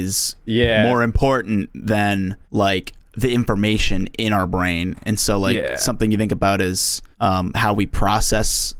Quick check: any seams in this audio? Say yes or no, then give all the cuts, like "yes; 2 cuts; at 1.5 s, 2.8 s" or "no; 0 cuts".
yes; 2 cuts; at 2.4 s, 7.1 s